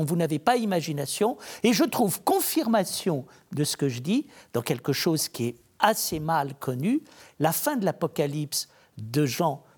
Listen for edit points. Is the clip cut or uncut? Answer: uncut